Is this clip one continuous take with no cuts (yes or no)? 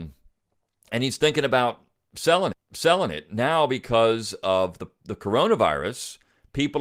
no